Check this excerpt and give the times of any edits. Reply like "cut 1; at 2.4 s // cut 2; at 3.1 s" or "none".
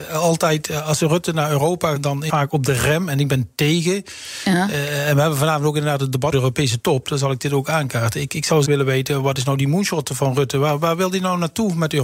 cut 1; at 1.9 s // cut 2; at 2.3 s // cut 3; at 6.3 s // cut 4; at 8.6 s